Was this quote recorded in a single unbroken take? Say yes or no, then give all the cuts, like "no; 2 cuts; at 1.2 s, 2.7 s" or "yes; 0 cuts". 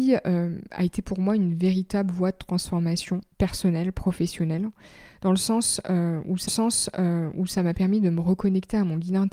no; 2 cuts; at 3.3 s, 6.5 s